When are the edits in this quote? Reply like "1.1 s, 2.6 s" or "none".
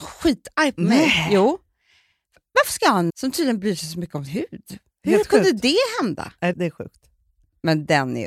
3.1 s, 4.3 s, 6.5 s